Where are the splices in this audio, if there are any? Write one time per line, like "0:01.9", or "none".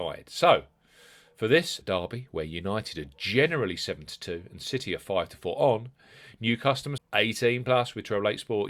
0:01.8
0:07.0